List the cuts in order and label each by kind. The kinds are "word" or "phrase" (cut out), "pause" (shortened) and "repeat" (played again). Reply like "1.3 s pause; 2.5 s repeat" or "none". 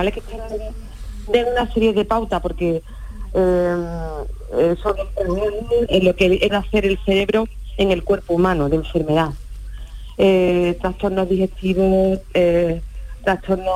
5.9 s word; 6.5 s word